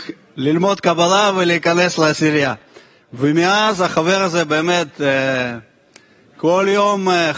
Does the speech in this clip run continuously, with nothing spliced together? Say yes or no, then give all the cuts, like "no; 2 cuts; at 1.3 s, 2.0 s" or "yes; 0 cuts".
yes; 0 cuts